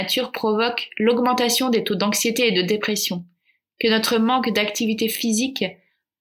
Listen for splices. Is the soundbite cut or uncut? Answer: uncut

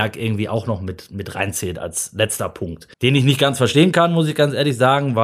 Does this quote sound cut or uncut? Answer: cut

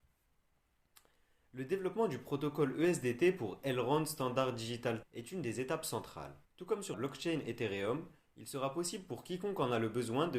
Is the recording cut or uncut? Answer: cut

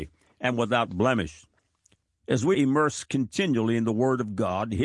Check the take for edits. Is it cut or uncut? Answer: cut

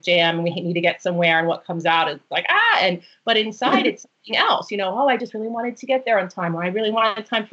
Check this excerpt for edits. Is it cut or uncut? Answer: uncut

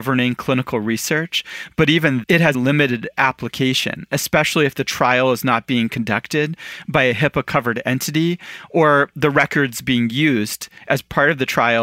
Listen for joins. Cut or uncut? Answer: cut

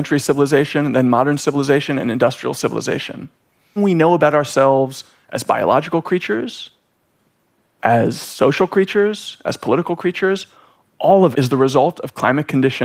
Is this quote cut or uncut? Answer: cut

